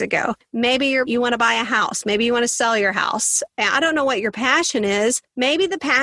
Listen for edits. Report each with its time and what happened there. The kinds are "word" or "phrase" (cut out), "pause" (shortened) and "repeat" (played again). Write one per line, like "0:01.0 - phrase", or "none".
0:01.1 - phrase